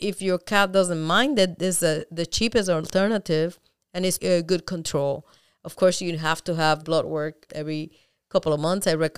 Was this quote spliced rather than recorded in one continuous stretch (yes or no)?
yes